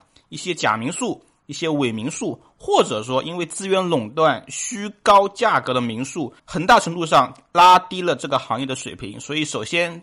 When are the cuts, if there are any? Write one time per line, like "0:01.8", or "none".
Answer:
0:06.4